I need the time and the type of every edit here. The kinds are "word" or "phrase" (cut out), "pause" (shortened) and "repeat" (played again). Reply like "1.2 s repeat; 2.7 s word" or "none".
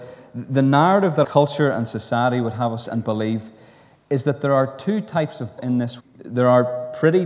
1.2 s word; 2.9 s word; 5.6 s word; 6.0 s word